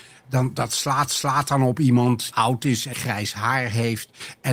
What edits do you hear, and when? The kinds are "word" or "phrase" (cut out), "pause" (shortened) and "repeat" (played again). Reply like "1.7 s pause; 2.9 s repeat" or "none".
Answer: 1.1 s repeat; 2.3 s word; 2.9 s word